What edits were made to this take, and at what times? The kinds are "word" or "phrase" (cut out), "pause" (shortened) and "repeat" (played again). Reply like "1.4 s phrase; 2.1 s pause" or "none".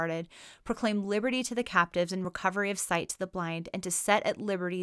none